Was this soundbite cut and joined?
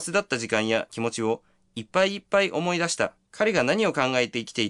yes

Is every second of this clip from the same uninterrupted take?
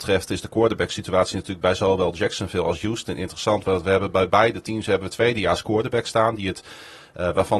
yes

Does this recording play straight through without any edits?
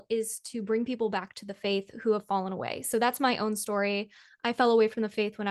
yes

